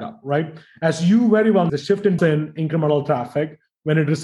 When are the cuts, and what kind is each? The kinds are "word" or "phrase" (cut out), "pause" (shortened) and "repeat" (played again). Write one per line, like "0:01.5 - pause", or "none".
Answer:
0:01.7 - phrase
0:02.2 - phrase